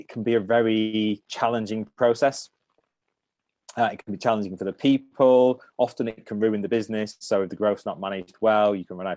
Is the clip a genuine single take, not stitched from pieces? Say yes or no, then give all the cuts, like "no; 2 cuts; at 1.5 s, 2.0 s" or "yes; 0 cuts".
yes; 0 cuts